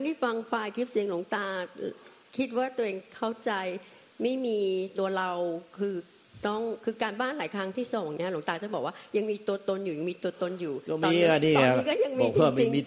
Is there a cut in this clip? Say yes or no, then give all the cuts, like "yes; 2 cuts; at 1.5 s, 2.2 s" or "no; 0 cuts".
no; 0 cuts